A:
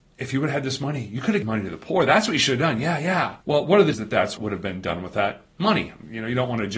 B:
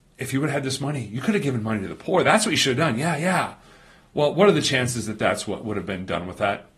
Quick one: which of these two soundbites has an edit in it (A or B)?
A